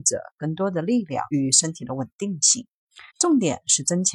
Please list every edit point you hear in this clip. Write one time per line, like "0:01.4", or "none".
0:01.3
0:03.1